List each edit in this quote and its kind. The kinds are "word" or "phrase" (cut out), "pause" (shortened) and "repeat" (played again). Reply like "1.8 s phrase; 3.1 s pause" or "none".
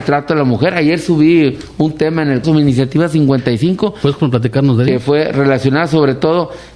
2.4 s word